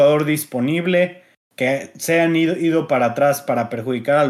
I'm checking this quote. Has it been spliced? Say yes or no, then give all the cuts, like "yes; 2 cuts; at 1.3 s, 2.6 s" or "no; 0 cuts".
no; 0 cuts